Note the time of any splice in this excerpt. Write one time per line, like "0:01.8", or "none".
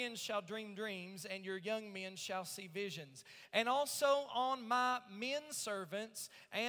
none